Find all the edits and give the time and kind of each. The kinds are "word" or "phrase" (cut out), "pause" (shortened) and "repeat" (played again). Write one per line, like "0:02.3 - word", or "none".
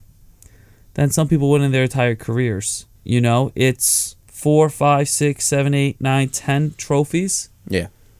0:03.0 - pause
0:04.2 - pause